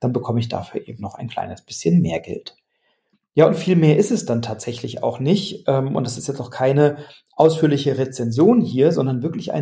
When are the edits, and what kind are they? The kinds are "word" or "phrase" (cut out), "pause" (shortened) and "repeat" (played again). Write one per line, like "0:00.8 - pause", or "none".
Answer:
none